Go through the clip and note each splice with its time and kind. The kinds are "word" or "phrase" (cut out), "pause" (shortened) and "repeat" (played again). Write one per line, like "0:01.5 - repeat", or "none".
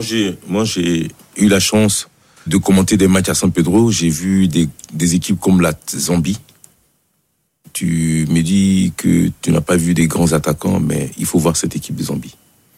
0:02.5 - word

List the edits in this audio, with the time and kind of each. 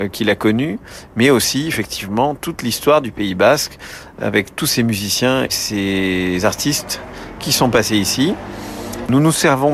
0:05.5 - word

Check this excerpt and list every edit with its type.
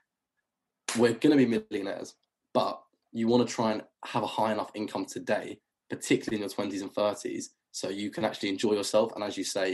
none

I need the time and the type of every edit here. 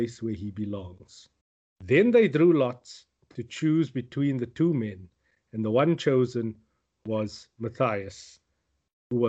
0:01.4 - pause

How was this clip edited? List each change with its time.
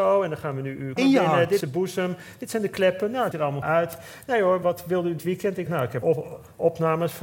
0:01.0 - word
0:01.6 - word
0:03.3 - word
0:03.6 - word
0:04.6 - word
0:05.2 - word
0:05.7 - word
0:06.0 - word

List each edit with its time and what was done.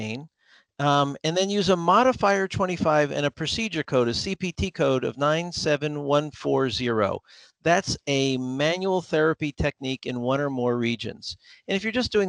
none

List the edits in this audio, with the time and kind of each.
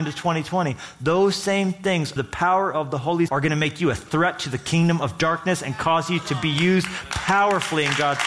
0:02.2 - word
0:03.3 - word

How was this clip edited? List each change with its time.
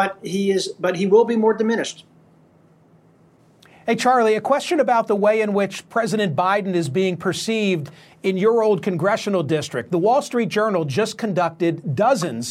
none

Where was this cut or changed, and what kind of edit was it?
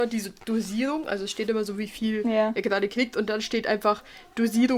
none

